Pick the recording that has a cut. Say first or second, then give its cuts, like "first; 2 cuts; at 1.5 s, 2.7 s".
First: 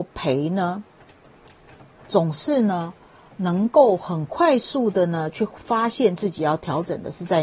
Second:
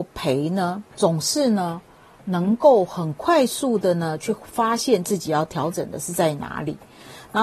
second; 1 cut; at 0.9 s